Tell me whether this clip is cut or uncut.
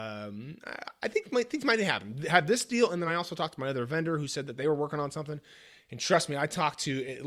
uncut